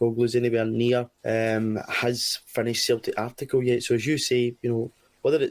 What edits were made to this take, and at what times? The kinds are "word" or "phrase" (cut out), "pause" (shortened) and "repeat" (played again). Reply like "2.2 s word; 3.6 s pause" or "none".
1.1 s pause